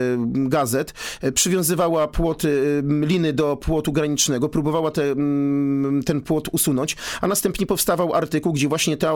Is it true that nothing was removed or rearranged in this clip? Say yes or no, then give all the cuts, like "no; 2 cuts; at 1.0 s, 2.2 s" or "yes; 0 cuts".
yes; 0 cuts